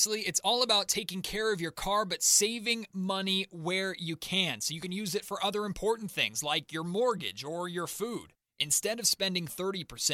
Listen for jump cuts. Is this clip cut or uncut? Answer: uncut